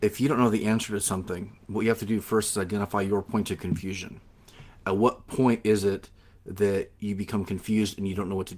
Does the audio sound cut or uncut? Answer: uncut